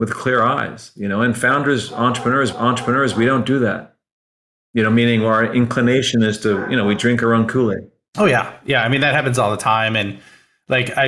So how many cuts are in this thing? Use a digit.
1